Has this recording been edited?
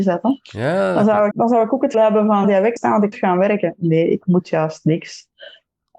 yes; 5 cuts; at 1.3 s, 1.9 s, 2.4 s, 2.8 s, 3.1 s

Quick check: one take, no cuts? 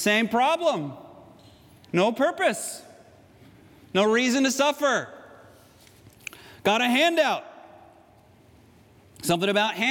yes; 0 cuts

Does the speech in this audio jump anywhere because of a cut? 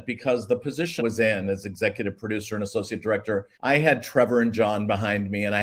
yes; 2 cuts; at 1.0 s, 3.5 s

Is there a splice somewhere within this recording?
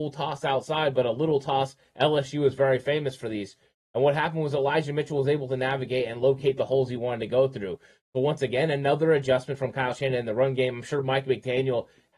no; 0 cuts

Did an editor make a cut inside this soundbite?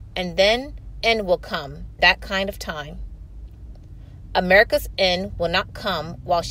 yes; 2 cuts; at 1.0 s, 2.0 s

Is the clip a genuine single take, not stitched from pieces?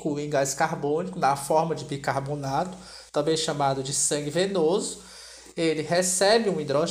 yes; 0 cuts

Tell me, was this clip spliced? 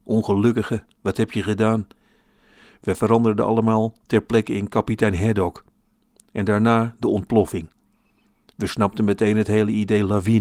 no; 0 cuts

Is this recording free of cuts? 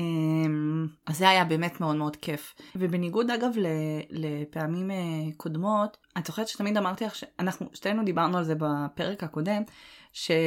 no; 1 cut; at 2.7 s

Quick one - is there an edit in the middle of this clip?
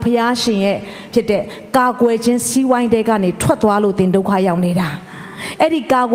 yes; 1 cut; at 1.1 s

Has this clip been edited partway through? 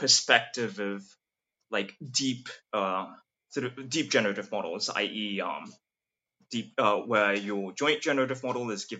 no; 0 cuts

